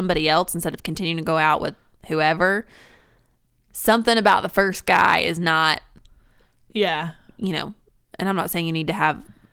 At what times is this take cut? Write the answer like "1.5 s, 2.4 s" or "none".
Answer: none